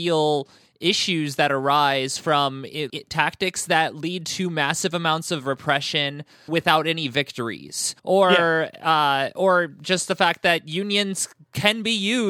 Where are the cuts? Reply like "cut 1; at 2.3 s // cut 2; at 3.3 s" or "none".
cut 1; at 2.9 s // cut 2; at 6.5 s // cut 3; at 8.0 s